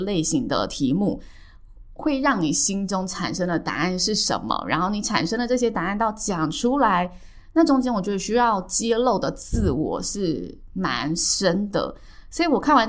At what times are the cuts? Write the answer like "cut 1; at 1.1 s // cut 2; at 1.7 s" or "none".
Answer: none